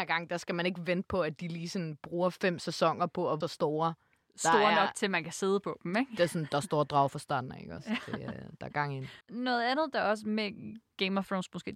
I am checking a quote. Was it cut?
yes; 2 cuts; at 3.4 s, 9.2 s

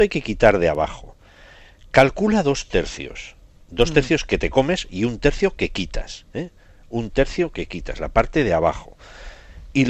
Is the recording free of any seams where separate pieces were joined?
yes; 0 cuts

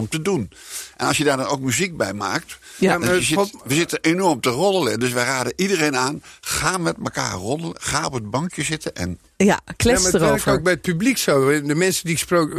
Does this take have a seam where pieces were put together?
no; 0 cuts

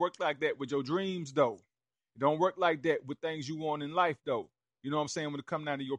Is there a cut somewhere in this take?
no; 0 cuts

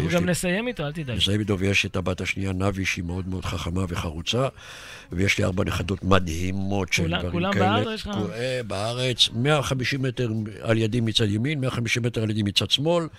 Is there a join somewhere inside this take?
yes; 1 cut; at 7.8 s

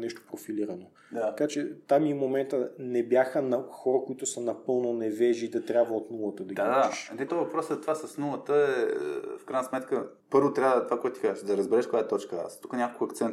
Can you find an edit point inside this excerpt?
yes; 2 cuts; at 7.3 s, 10.2 s

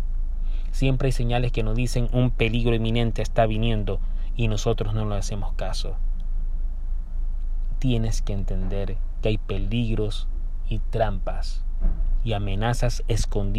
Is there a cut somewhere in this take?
no; 0 cuts

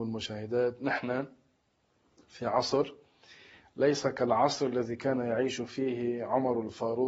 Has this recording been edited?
no; 0 cuts

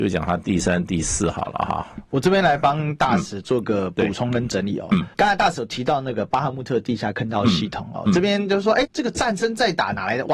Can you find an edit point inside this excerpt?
yes; 2 cuts; at 5.1 s, 8.8 s

